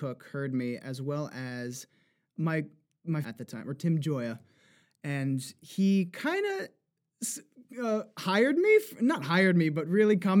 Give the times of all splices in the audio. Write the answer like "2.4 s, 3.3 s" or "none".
3.2 s